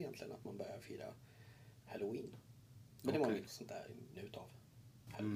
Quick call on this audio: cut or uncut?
cut